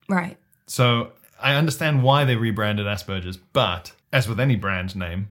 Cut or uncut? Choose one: cut